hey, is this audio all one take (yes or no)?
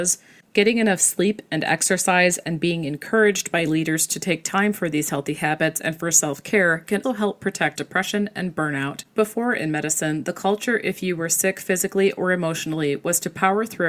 no